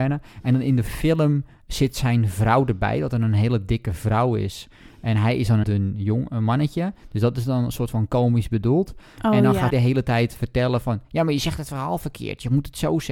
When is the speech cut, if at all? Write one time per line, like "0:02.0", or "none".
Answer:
0:05.6
0:09.7